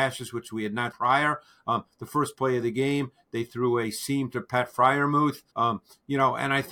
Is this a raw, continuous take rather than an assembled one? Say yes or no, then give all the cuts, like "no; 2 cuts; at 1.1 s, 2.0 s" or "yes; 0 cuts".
no; 2 cuts; at 0.9 s, 5.5 s